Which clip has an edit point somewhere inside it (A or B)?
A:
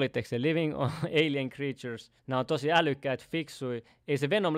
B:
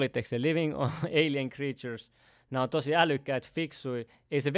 A